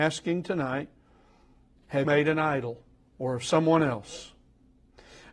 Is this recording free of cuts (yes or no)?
no